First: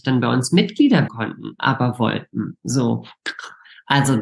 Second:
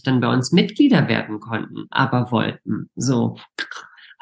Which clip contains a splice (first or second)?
first